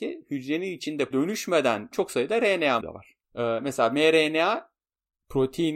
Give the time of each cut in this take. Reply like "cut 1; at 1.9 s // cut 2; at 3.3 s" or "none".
cut 1; at 1.1 s // cut 2; at 1.9 s // cut 3; at 2.8 s // cut 4; at 3.2 s